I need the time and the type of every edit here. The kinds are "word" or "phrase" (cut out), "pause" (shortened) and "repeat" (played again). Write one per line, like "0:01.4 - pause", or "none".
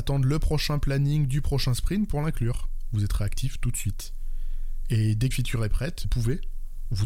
0:05.3 - word
0:06.0 - word